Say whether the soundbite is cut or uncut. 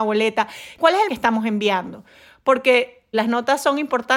cut